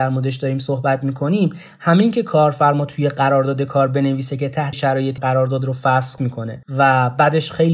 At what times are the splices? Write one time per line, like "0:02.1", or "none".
0:04.7
0:05.2
0:06.2